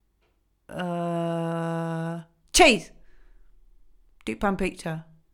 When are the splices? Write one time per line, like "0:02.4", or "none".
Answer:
none